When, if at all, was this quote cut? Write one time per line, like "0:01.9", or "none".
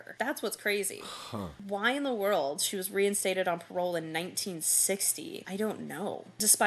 none

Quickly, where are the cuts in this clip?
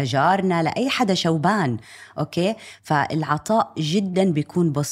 none

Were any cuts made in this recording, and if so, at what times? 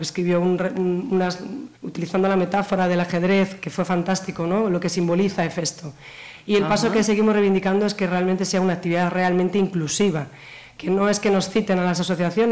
0:01.8

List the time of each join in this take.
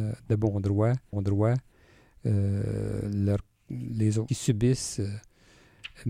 0:01.1
0:04.3

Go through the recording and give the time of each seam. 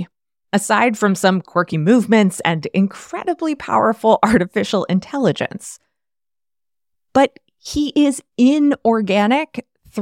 none

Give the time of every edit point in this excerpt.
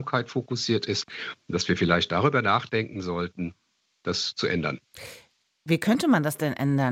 none

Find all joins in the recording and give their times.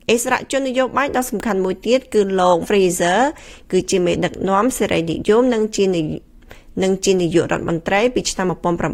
0:02.6

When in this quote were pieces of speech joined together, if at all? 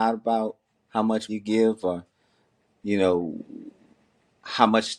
0:01.3

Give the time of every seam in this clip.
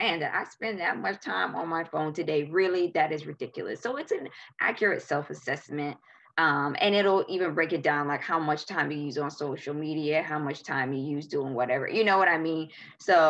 none

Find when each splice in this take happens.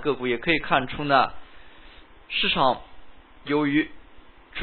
none

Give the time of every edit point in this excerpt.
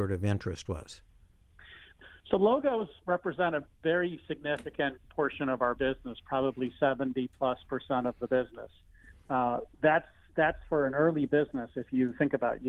none

